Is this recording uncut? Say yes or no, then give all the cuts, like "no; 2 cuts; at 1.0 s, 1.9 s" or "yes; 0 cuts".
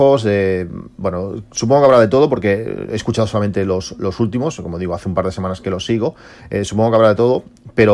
yes; 0 cuts